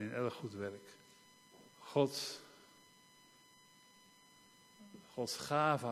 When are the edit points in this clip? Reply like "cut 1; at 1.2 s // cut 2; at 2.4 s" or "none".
cut 1; at 1.7 s